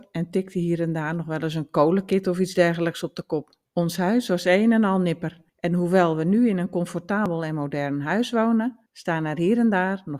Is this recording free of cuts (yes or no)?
no